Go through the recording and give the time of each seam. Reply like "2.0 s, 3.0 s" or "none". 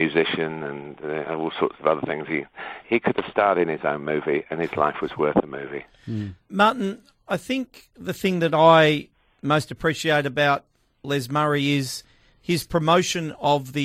2.8 s